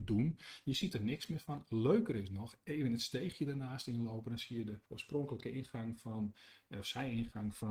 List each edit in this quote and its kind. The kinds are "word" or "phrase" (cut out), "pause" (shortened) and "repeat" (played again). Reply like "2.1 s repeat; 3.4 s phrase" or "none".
4.9 s pause